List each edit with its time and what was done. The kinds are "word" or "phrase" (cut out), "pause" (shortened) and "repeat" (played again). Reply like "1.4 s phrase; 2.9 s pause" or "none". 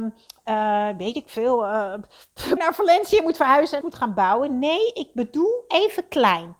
2.6 s word; 3.8 s phrase

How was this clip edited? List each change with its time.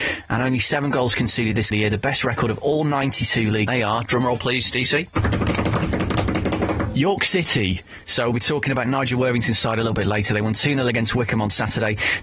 1.7 s word; 3.7 s phrase

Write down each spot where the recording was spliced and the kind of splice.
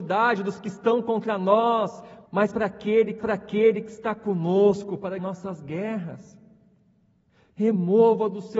2.3 s pause; 3.2 s repeat; 5.2 s word

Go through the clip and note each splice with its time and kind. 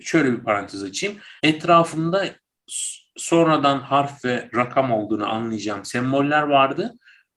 1.4 s pause

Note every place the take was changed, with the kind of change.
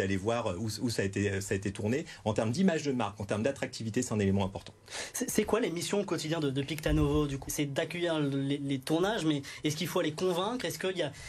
7.5 s word

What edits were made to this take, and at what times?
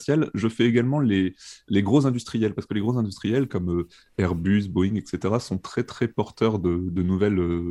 none

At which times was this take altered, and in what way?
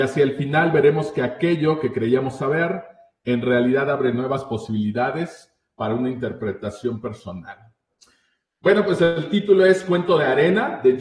none

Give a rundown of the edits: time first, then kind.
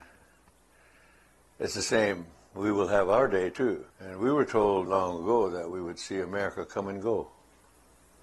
3.9 s pause; 4.9 s word

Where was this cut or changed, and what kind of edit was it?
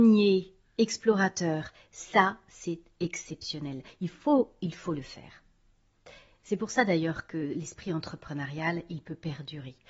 none

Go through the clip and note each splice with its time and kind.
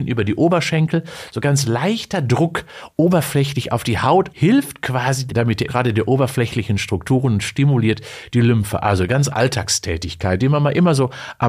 4.3 s word; 5.3 s phrase; 5.7 s word; 9.3 s word

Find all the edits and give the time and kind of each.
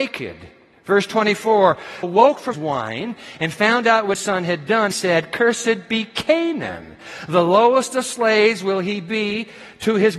2.0 s phrase; 2.5 s word; 4.1 s phrase; 4.9 s word

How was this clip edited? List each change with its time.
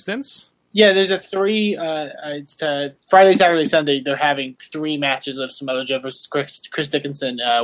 3.0 s pause

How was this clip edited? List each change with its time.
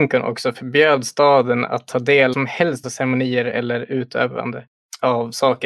2.3 s phrase; 2.8 s word

